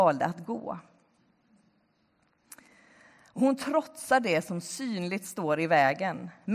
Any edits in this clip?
no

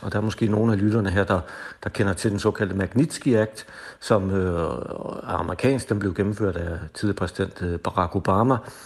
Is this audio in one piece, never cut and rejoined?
yes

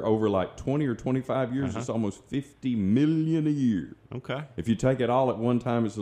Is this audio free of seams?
yes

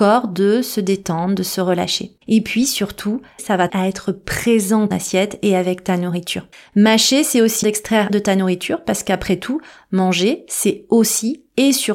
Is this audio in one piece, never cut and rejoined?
no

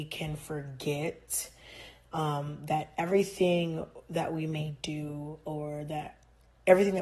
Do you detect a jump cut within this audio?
no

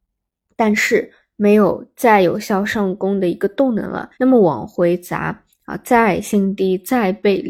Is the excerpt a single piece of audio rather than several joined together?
no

